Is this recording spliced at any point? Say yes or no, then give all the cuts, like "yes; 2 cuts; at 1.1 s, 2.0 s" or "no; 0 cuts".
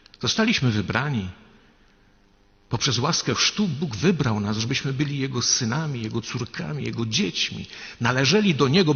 no; 0 cuts